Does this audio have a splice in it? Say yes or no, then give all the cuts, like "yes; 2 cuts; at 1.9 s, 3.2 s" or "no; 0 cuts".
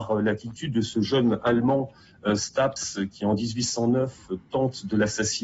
no; 0 cuts